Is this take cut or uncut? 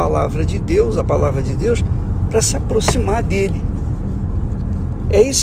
cut